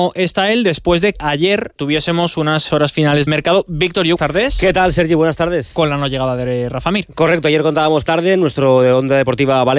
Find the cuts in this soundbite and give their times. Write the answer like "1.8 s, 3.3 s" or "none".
1.1 s, 1.8 s, 2.7 s, 3.3 s, 4.2 s, 8.1 s